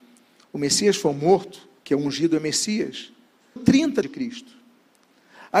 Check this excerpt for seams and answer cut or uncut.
cut